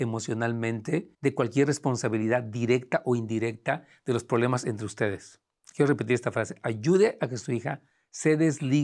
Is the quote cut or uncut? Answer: cut